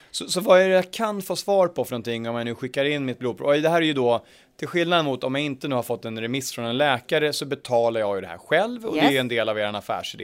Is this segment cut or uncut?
uncut